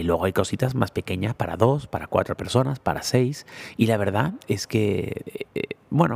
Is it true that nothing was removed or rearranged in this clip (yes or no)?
yes